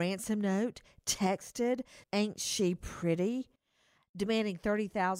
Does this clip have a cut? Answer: yes; 1 cut; at 2.0 s

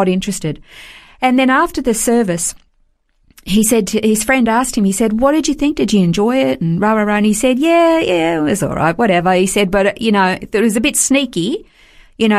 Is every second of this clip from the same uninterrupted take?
yes; 0 cuts

